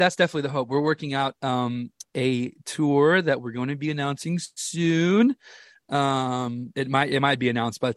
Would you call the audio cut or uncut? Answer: uncut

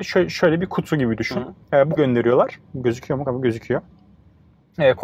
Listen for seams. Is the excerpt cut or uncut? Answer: cut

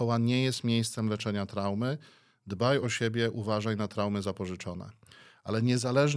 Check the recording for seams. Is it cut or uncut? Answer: uncut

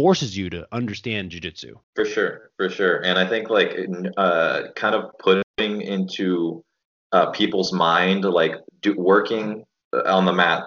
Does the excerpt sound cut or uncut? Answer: cut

